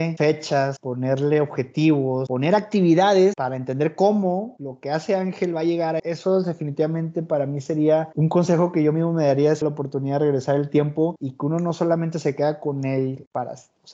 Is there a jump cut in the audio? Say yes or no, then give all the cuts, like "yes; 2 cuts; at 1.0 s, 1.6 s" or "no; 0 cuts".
yes; 2 cuts; at 6.0 s, 9.6 s